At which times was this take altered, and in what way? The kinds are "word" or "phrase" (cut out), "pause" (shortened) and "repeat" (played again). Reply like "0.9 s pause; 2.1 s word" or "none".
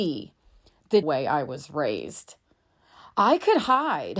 1.0 s word